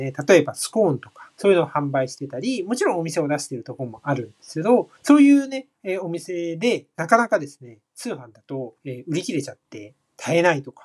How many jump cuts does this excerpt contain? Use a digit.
3